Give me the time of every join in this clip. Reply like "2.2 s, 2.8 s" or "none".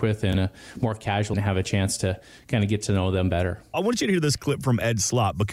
1.3 s